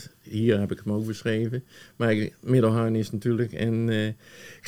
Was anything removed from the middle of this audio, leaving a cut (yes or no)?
no